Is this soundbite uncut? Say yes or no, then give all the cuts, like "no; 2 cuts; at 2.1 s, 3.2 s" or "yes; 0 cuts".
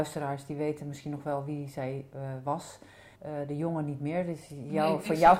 no; 1 cut; at 3.2 s